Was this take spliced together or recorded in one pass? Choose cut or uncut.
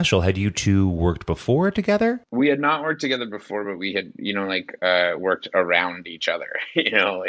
uncut